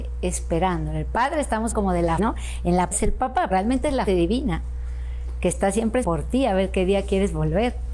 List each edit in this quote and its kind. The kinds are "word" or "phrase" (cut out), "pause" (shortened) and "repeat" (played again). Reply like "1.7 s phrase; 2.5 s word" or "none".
1.7 s word; 2.2 s word; 2.9 s word; 3.5 s word; 4.1 s word; 6.0 s word